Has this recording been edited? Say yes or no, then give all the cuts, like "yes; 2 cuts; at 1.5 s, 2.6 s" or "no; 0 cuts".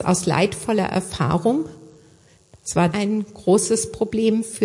yes; 1 cut; at 2.9 s